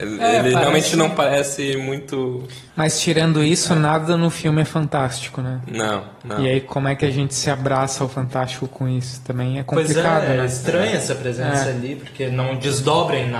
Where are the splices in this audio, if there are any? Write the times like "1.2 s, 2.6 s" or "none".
2.7 s

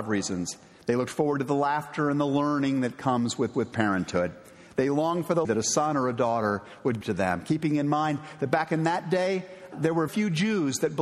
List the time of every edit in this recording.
3.5 s, 5.4 s, 7.0 s, 9.7 s, 10.1 s

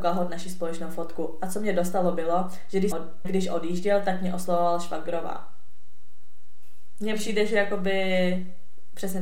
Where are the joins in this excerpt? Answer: 2.9 s, 3.2 s

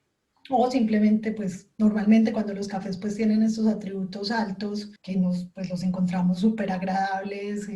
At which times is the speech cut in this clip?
5.0 s

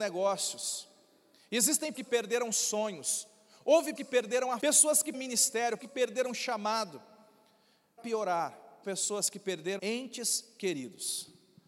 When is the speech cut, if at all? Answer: 1.9 s, 3.9 s, 4.6 s, 5.1 s, 5.8 s, 8.0 s, 8.8 s, 9.8 s

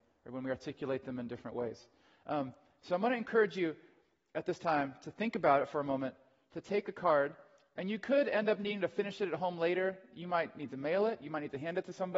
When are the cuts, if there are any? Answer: none

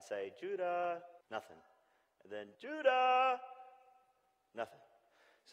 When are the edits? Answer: 1.2 s, 2.5 s

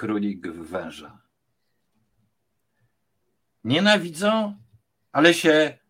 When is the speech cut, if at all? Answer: none

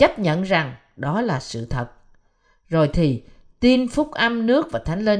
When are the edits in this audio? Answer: none

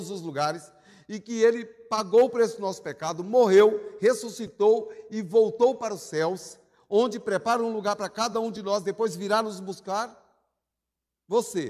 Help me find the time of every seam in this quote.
none

